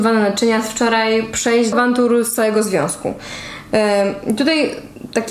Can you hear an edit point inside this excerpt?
yes; 1 cut; at 1.7 s

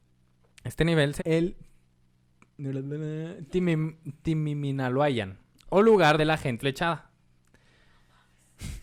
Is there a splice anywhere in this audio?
yes; 3 cuts; at 1.2 s, 6.2 s, 6.6 s

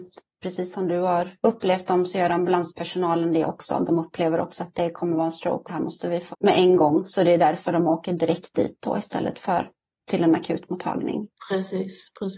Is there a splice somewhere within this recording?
yes; 2 cuts; at 5.7 s, 6.3 s

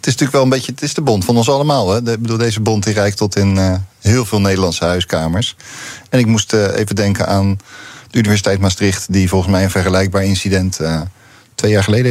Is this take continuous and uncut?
yes; 0 cuts

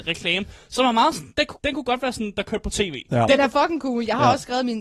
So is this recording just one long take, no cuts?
no; 1 cut; at 1.5 s

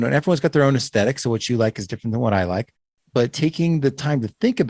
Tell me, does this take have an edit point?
no; 0 cuts

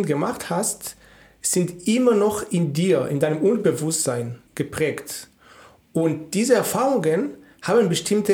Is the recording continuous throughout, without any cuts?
no; 1 cut; at 4.5 s

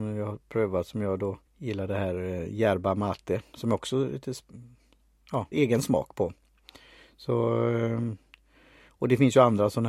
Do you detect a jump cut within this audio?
yes; 2 cuts; at 1.5 s, 5.5 s

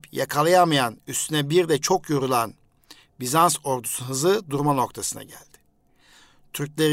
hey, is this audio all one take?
yes; 0 cuts

